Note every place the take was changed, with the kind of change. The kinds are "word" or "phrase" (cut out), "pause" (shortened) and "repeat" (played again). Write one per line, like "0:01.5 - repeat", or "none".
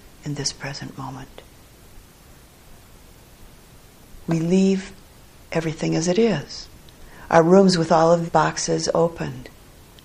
0:08.3 - word